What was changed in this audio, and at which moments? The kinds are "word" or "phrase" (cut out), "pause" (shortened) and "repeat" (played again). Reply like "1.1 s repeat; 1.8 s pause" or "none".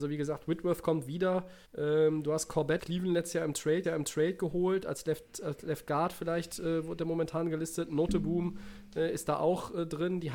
1.6 s pause; 2.8 s word; 3.8 s repeat